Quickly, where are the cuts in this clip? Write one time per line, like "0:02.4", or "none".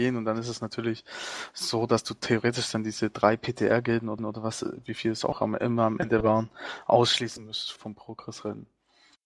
0:04.2
0:07.8